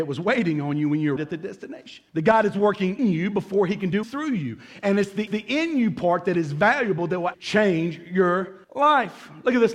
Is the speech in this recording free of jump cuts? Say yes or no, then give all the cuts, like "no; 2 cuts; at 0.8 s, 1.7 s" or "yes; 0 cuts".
no; 7 cuts; at 1.2 s, 2.1 s, 3.0 s, 4.0 s, 5.3 s, 7.3 s, 8.6 s